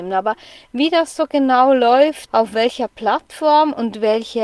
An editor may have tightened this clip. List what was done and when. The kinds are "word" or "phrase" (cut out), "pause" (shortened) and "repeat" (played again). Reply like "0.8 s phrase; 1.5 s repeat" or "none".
2.3 s word